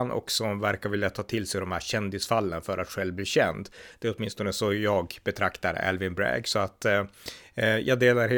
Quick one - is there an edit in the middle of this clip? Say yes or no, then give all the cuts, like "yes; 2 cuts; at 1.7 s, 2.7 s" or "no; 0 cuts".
no; 0 cuts